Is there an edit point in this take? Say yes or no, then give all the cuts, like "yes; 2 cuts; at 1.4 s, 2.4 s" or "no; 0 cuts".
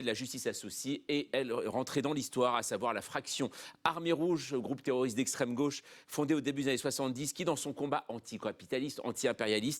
no; 0 cuts